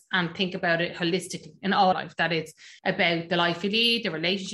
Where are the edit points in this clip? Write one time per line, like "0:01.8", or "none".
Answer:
0:01.9
0:02.8